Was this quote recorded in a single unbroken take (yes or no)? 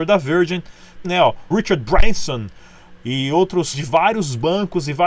no